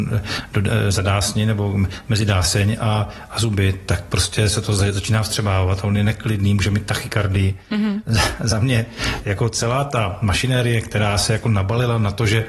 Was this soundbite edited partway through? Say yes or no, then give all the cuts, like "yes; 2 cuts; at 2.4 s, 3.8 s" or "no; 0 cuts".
no; 0 cuts